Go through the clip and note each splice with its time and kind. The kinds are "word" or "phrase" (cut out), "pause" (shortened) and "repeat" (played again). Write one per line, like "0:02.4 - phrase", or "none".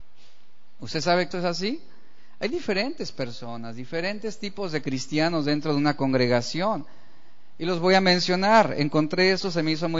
0:01.3 - word

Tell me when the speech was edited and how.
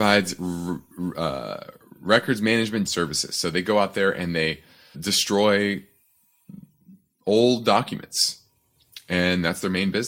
0:02.9 - phrase
0:04.9 - word

